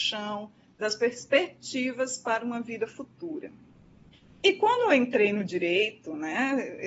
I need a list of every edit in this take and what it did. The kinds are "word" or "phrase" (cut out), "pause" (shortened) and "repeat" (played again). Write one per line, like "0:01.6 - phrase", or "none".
none